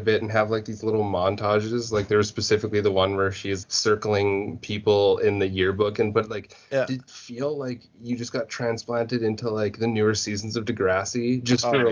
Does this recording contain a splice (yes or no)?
yes